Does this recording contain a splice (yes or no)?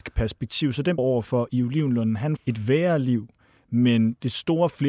yes